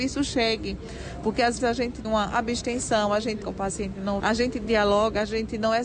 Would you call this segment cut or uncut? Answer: cut